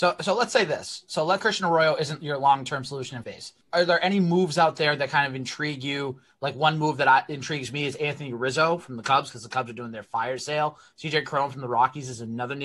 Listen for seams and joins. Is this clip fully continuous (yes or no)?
no